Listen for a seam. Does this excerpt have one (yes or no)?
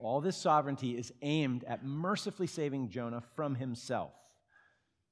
no